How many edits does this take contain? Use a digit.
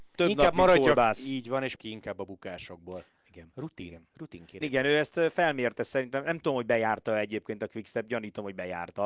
2